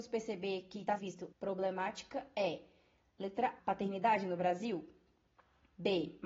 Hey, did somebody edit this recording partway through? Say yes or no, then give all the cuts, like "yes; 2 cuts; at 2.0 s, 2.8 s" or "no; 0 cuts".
yes; 3 cuts; at 1.0 s, 1.3 s, 3.6 s